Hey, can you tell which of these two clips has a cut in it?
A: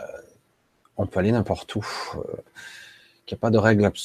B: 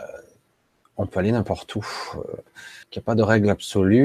B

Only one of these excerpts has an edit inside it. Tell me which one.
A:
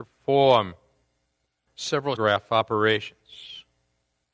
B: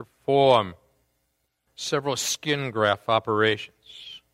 A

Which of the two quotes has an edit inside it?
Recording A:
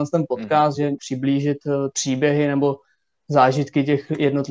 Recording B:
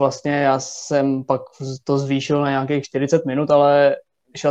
A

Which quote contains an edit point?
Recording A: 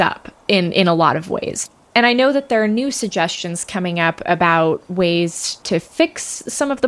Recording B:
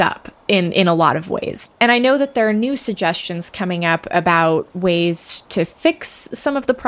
B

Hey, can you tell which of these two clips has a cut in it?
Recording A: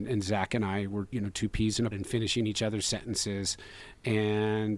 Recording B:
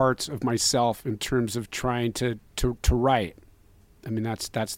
A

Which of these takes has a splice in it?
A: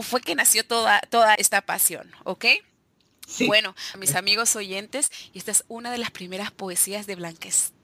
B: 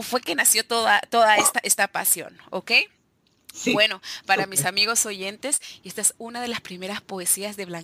A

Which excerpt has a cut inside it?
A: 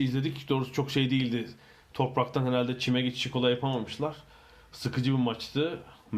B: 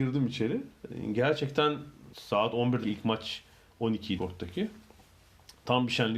B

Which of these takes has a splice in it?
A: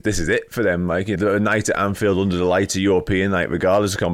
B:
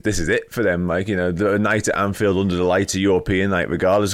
A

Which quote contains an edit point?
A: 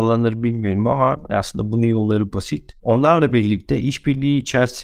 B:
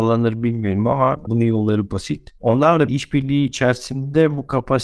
B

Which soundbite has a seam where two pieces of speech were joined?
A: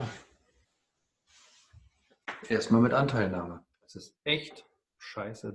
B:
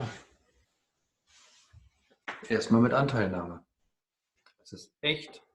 A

